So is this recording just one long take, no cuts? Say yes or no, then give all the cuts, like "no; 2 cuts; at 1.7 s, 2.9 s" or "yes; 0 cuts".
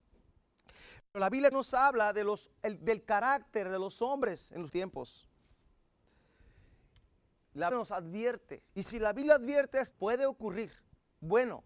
no; 6 cuts; at 1.5 s, 2.6 s, 4.7 s, 7.7 s, 8.7 s, 9.9 s